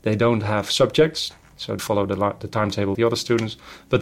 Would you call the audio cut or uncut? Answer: cut